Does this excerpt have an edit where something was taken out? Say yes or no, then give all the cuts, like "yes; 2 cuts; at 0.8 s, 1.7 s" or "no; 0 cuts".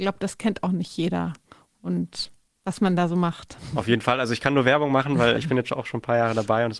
yes; 1 cut; at 5.4 s